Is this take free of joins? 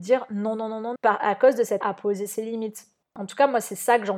no; 3 cuts; at 1.0 s, 1.8 s, 3.0 s

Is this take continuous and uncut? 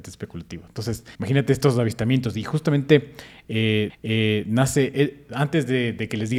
no; 2 cuts; at 1.1 s, 3.9 s

